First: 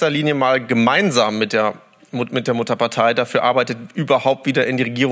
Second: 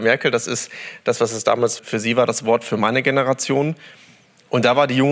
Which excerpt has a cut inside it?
second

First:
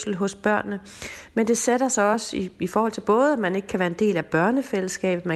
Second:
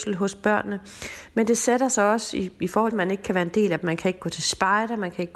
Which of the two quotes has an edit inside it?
second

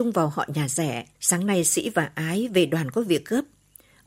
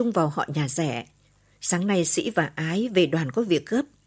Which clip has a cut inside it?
first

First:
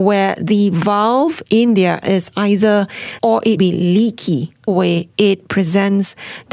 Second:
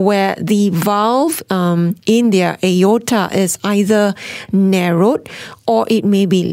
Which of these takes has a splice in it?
first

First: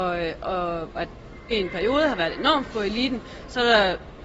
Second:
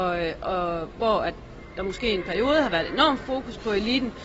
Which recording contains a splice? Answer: first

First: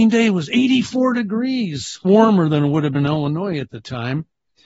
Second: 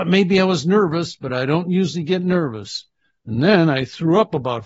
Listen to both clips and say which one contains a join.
first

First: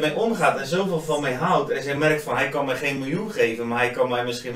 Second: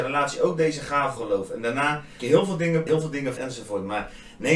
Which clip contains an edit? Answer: second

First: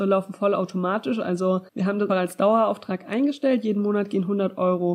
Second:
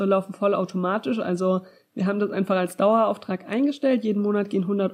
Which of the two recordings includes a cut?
first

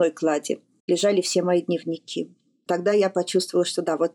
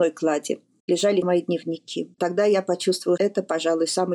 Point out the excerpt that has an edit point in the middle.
second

